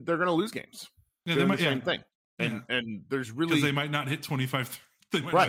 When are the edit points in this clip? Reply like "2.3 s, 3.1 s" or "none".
none